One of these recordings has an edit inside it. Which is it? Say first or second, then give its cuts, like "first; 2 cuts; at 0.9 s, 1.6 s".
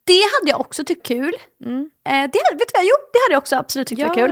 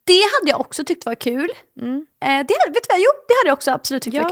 first; 1 cut; at 1.0 s